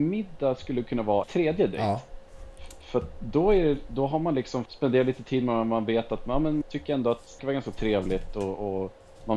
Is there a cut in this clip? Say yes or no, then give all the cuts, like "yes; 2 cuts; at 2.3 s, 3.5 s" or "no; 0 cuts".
yes; 4 cuts; at 1.2 s, 4.7 s, 6.6 s, 7.4 s